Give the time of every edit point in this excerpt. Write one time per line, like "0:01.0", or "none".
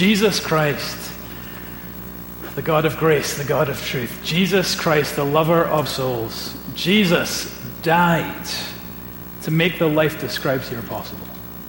0:05.8